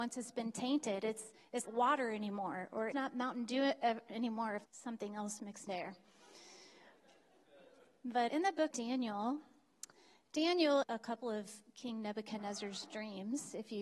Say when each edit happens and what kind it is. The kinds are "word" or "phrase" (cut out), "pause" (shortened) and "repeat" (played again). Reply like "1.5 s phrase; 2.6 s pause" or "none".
1.6 s word; 2.9 s word; 4.7 s word; 5.7 s word; 8.3 s word; 8.7 s word; 10.8 s word

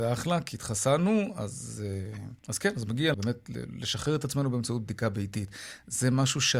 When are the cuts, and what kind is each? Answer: 2.4 s pause; 3.1 s word

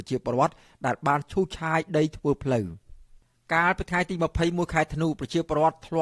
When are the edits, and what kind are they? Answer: none

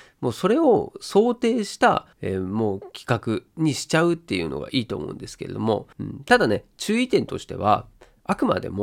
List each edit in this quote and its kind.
2.1 s pause; 5.9 s pause

